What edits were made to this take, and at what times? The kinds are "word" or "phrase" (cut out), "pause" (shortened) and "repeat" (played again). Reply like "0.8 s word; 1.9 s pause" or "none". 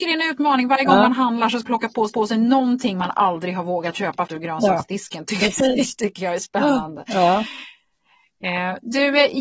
1.6 s word; 2.1 s repeat; 4.3 s word